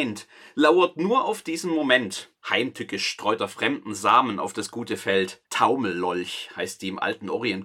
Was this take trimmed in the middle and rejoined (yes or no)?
yes